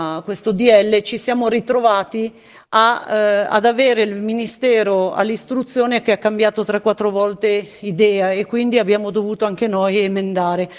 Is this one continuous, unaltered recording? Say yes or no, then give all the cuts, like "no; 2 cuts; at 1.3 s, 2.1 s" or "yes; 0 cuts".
yes; 0 cuts